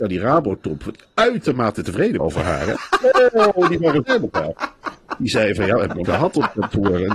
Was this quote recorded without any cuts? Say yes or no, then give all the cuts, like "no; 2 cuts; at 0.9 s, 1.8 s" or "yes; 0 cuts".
no; 3 cuts; at 2.2 s, 4.0 s, 6.0 s